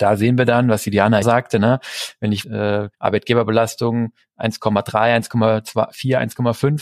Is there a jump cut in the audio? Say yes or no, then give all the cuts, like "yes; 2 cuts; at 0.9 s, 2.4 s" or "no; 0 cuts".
yes; 3 cuts; at 1.2 s, 2.4 s, 2.9 s